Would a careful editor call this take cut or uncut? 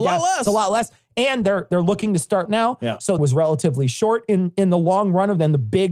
cut